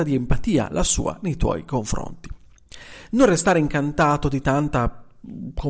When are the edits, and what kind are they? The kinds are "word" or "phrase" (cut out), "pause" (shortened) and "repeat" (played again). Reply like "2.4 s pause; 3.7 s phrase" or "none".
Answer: none